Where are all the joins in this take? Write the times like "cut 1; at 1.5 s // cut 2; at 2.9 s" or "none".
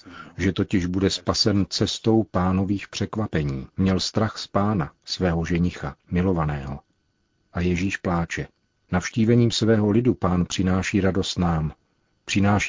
cut 1; at 3.7 s // cut 2; at 6.0 s